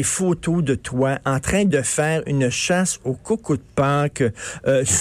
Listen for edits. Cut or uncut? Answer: uncut